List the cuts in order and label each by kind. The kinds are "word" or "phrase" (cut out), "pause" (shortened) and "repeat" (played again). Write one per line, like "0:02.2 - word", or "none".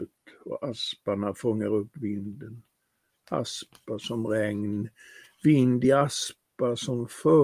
none